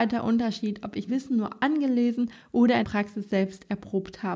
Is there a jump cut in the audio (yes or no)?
yes